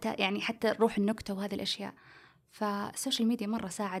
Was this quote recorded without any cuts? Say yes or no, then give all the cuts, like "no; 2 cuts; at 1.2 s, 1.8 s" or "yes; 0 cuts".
yes; 0 cuts